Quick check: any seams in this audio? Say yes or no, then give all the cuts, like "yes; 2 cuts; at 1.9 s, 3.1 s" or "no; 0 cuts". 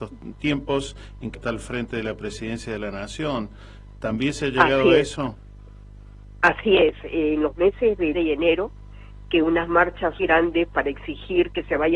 yes; 4 cuts; at 1.3 s, 8.1 s, 9.4 s, 10.2 s